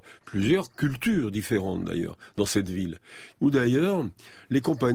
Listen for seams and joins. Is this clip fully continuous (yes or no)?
yes